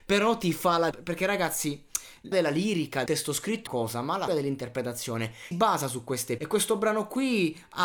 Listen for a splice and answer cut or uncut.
cut